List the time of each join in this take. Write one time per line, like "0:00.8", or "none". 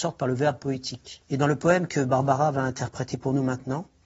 0:01.2